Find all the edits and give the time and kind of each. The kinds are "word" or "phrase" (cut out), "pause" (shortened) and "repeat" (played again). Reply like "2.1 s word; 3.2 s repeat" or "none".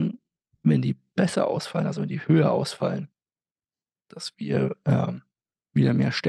none